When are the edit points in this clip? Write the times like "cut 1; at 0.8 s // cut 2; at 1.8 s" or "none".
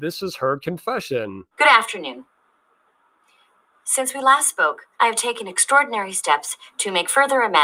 cut 1; at 1.5 s // cut 2; at 4.9 s